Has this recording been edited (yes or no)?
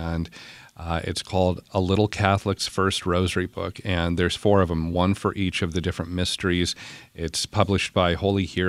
no